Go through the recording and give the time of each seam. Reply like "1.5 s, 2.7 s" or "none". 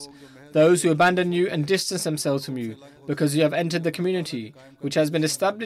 none